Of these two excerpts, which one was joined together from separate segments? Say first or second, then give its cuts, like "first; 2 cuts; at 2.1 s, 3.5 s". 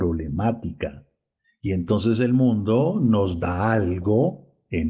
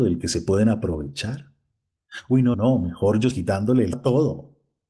second; 3 cuts; at 2.5 s, 3.3 s, 3.9 s